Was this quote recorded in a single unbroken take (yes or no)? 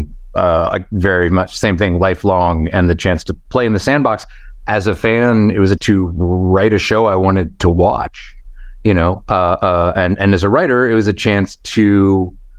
no